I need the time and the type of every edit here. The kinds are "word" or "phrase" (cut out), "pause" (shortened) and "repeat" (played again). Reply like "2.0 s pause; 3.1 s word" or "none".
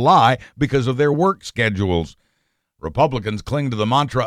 none